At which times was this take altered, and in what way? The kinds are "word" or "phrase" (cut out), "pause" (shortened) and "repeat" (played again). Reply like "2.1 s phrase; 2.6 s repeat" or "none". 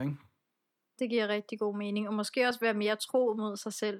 none